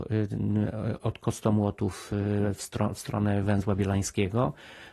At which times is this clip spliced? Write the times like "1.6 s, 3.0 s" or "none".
none